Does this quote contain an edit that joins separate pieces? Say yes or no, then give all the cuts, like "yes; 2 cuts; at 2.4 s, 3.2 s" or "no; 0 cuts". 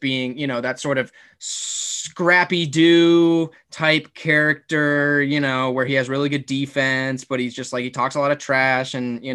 no; 0 cuts